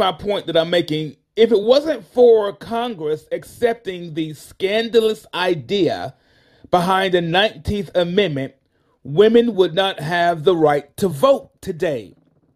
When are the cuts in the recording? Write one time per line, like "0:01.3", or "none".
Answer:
none